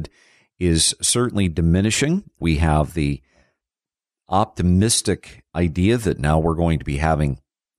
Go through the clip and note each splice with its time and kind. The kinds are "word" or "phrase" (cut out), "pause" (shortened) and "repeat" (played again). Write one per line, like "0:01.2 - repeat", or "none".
none